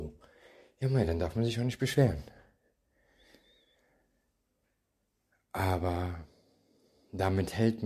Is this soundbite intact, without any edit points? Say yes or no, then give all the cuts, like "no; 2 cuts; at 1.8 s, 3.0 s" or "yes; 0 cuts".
yes; 0 cuts